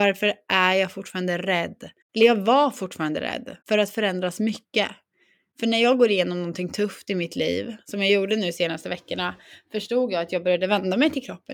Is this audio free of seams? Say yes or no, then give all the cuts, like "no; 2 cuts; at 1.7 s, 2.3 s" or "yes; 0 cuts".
yes; 0 cuts